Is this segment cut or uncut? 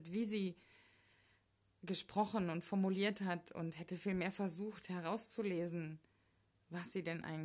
uncut